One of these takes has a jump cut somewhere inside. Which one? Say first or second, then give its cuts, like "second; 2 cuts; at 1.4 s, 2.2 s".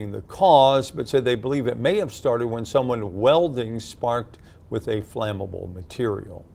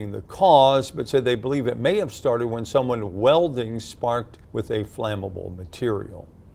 second; 1 cut; at 4.4 s